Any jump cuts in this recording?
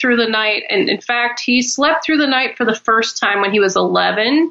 no; 0 cuts

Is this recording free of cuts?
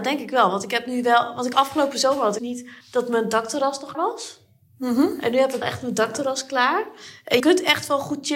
no; 6 cuts; at 1.5 s, 2.4 s, 2.8 s, 3.9 s, 5.6 s, 7.4 s

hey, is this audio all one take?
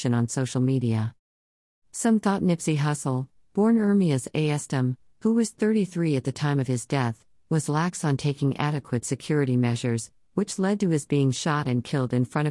yes; 0 cuts

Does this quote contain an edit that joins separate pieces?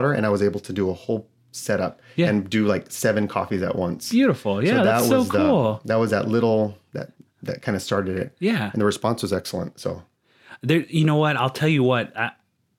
no; 0 cuts

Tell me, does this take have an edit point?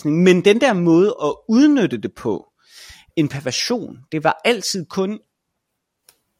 yes; 1 cut; at 3.1 s

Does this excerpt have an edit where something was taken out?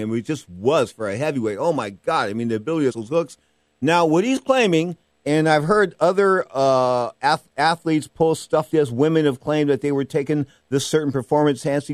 yes; 2 cuts; at 2.9 s, 8.7 s

